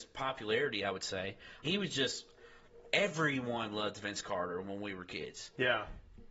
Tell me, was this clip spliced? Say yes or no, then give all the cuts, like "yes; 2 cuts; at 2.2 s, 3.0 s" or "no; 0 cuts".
yes; 1 cut; at 1.6 s